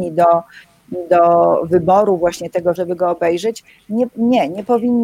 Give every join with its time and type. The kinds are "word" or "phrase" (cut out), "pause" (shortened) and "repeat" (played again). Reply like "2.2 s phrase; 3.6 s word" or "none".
2.8 s word